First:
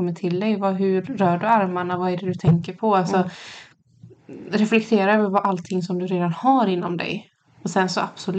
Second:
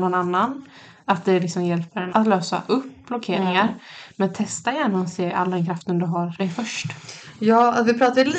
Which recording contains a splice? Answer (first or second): second